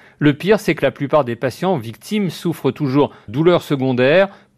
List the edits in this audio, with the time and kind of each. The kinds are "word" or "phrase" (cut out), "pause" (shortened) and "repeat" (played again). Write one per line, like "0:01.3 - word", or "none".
0:03.3 - word